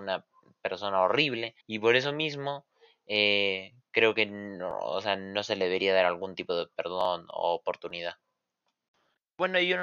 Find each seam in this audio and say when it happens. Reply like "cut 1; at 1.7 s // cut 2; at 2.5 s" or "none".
cut 1; at 1.6 s